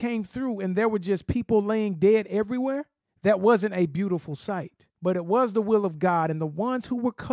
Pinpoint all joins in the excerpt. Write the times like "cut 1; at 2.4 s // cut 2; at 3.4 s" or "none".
cut 1; at 3.0 s // cut 2; at 4.9 s